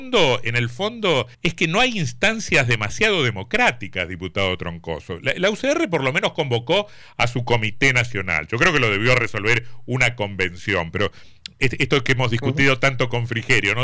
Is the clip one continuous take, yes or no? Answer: no